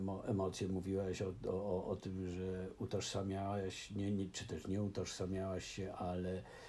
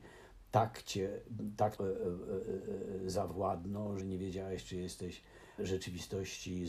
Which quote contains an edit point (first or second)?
second